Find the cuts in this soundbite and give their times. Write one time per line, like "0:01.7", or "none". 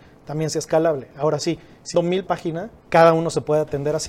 0:01.9
0:02.3
0:02.8